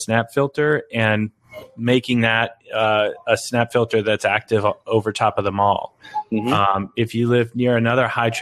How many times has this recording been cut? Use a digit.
0